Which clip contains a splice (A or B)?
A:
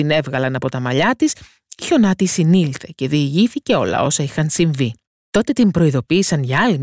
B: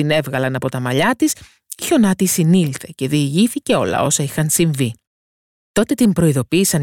A